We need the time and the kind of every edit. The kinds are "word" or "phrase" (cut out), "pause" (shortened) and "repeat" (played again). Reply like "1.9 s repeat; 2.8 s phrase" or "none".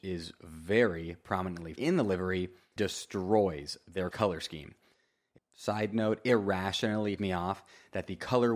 1.8 s word; 2.8 s word; 4.1 s word; 5.4 s word; 7.2 s word